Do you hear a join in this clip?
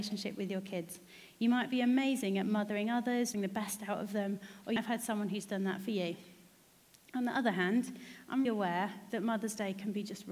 yes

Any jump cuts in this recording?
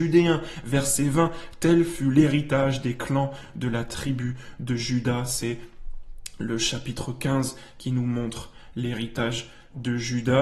no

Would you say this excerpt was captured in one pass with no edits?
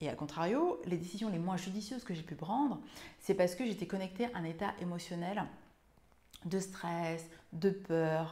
yes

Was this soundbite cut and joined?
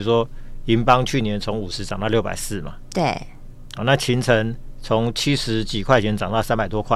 no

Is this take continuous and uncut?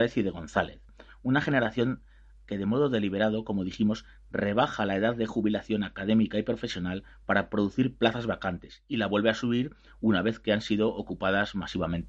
yes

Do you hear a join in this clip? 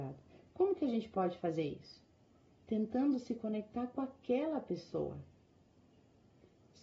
no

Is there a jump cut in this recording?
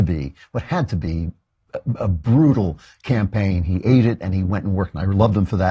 no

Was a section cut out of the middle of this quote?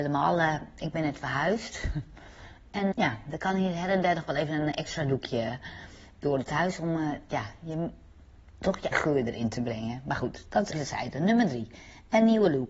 yes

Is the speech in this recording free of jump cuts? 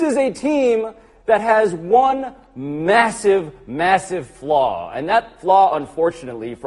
yes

